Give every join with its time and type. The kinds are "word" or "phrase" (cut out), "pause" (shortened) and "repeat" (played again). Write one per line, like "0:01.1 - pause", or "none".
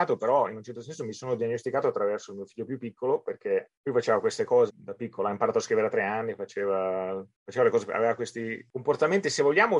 0:04.7 - word